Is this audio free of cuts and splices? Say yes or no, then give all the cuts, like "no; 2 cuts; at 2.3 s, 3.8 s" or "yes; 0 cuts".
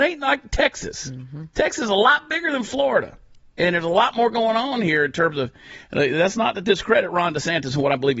yes; 0 cuts